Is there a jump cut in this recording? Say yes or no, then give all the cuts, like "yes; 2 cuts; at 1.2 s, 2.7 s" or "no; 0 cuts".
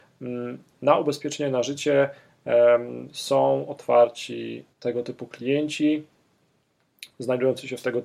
yes; 1 cut; at 4.7 s